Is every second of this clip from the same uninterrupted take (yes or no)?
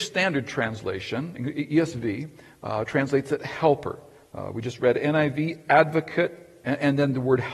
yes